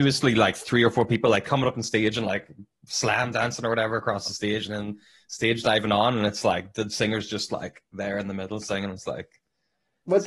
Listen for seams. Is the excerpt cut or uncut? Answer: uncut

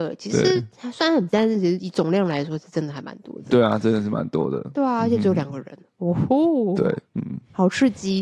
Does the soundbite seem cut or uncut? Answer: cut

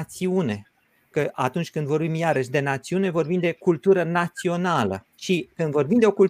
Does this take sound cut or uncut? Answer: cut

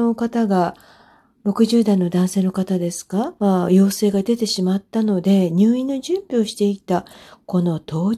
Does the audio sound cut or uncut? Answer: cut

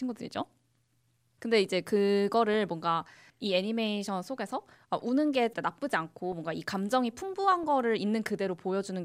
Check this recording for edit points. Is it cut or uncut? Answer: cut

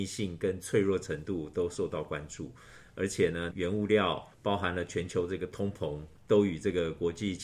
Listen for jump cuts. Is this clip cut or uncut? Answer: cut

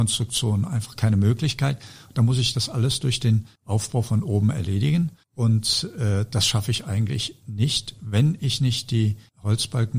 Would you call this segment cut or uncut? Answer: uncut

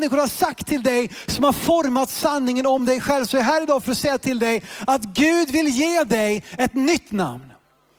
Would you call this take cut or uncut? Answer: uncut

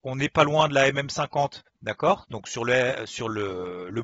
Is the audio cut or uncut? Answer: cut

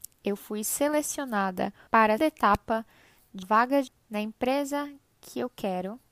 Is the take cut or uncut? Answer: cut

